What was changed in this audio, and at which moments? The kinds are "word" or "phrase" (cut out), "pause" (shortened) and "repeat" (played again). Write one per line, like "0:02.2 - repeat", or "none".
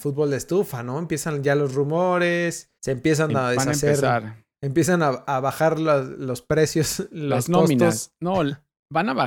0:02.8 - pause
0:04.5 - pause